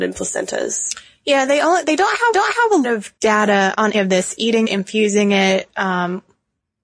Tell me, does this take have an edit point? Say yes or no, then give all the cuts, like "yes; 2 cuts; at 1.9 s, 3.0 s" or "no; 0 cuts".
yes; 5 cuts; at 2.3 s, 2.8 s, 3.2 s, 3.9 s, 4.6 s